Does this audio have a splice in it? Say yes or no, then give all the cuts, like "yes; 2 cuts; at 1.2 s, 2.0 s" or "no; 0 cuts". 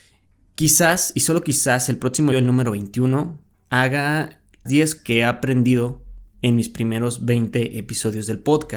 yes; 3 cuts; at 2.3 s, 4.7 s, 5.0 s